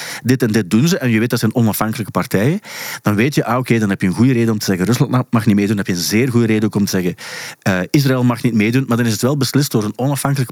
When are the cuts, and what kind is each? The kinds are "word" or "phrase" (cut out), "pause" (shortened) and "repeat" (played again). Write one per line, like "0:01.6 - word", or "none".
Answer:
none